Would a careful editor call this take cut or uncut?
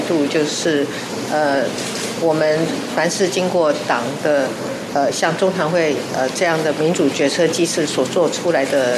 uncut